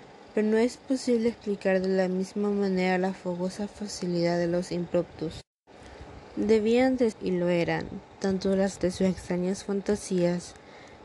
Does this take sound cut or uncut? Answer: cut